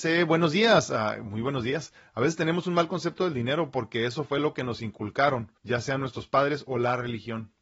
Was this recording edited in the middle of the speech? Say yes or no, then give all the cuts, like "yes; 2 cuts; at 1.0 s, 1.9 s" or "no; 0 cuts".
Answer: yes; 1 cut; at 5.6 s